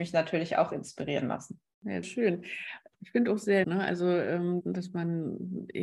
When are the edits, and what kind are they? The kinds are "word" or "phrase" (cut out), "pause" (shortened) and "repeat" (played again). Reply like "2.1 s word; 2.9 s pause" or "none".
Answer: 2.0 s word; 3.6 s word; 4.6 s word